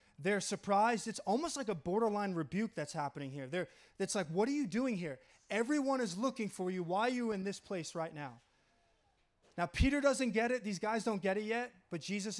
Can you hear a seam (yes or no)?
no